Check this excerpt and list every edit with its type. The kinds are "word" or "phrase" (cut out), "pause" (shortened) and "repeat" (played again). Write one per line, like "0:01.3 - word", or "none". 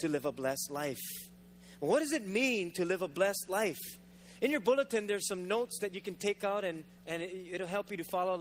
none